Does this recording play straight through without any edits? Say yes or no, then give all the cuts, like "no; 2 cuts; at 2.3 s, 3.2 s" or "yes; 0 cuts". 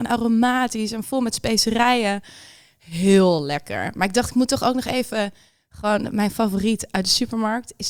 yes; 0 cuts